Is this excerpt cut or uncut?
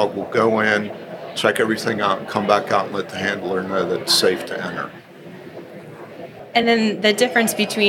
uncut